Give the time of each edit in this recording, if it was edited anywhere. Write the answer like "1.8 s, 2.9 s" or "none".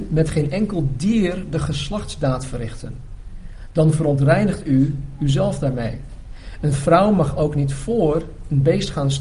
none